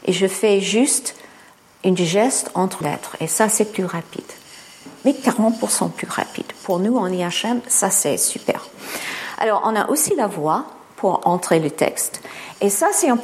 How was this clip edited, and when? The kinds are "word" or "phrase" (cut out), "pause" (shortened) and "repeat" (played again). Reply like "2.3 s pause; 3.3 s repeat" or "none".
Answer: 2.8 s word

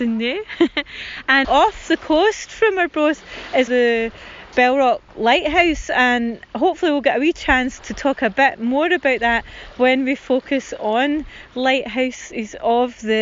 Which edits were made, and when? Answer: 1.4 s phrase; 3.7 s word; 5.1 s pause

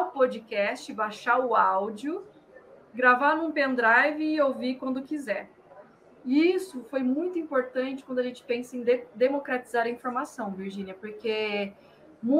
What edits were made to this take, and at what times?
none

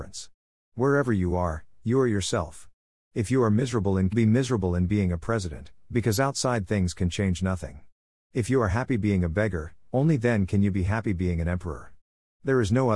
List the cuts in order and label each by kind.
4.1 s phrase

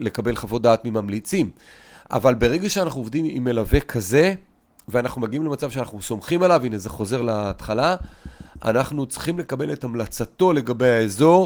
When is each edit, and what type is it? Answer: none

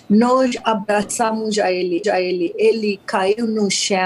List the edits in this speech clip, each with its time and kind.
2.0 s repeat

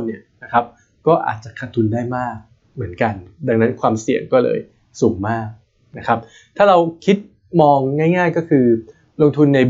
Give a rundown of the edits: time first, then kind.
none

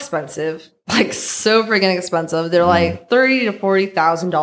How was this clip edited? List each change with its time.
none

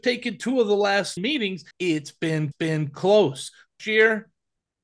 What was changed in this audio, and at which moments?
1.2 s word; 1.7 s pause; 2.5 s repeat; 3.8 s phrase

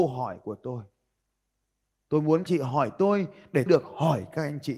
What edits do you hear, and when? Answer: 2.5 s word; 3.7 s word

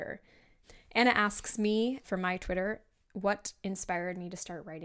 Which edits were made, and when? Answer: 2.0 s word

